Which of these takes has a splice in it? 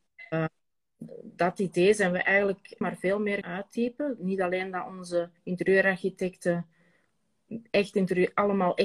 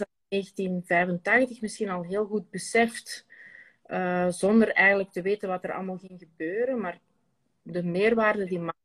first; 3 cuts; at 2.8 s, 3.4 s, 5.4 s

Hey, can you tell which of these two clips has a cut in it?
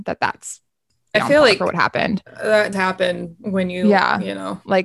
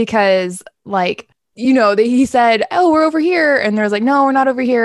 first; 2 cuts; at 1.1 s, 2.7 s

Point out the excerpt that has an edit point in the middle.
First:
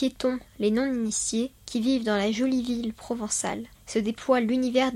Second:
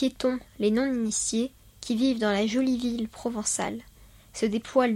first; 2 cuts; at 1.5 s, 3.7 s

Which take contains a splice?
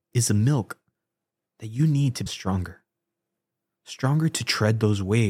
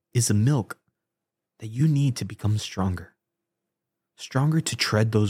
first; 1 cut; at 2.3 s

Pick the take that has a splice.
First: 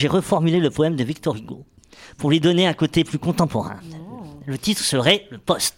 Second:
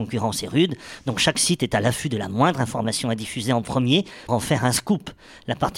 second; 1 cut; at 4.3 s

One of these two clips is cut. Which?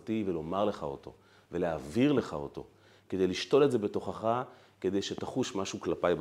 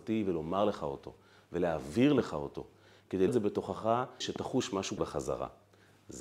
second; 3 cuts; at 3.3 s, 4.2 s, 5.0 s

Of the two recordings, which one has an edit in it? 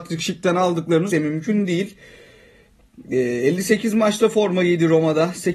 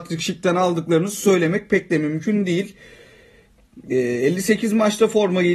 first; 1 cut; at 1.1 s

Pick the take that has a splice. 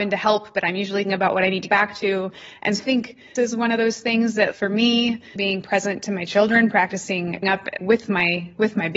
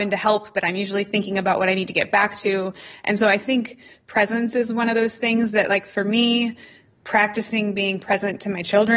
first; 8 cuts; at 1.1 s, 1.7 s, 2.8 s, 3.4 s, 4.5 s, 5.4 s, 7.4 s, 7.8 s

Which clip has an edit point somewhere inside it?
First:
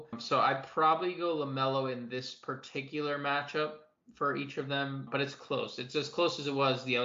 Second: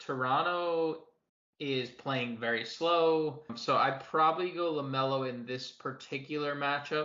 second; 1 cut; at 1.3 s

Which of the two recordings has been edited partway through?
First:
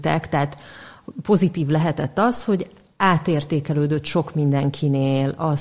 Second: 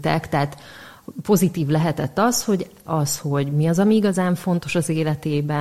second; 1 cut; at 2.9 s

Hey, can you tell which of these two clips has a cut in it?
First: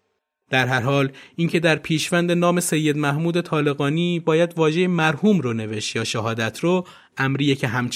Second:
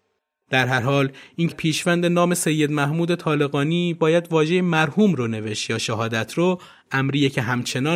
second; 1 cut; at 1.5 s

